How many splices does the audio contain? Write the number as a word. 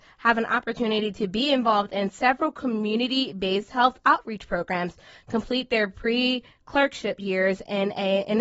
zero